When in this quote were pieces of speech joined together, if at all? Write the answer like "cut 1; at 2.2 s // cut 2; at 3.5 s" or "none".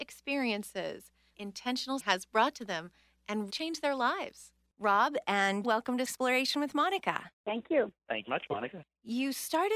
cut 1; at 1.3 s // cut 2; at 2.0 s // cut 3; at 3.5 s // cut 4; at 5.6 s // cut 5; at 6.0 s // cut 6; at 8.3 s